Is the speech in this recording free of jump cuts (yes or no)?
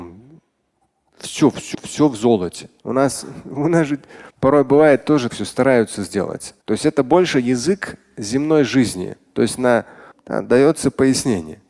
no